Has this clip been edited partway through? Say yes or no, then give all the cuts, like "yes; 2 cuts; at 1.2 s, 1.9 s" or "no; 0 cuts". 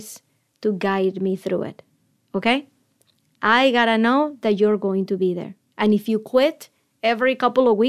no; 0 cuts